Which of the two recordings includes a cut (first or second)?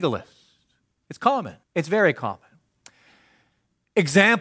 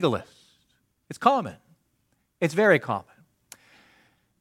first